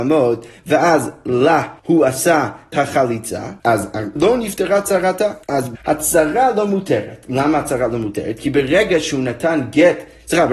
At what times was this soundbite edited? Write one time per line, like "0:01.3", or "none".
0:01.8
0:02.7
0:03.6
0:04.2
0:05.4
0:05.7